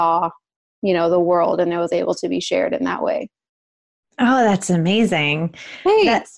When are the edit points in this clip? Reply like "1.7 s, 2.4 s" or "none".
none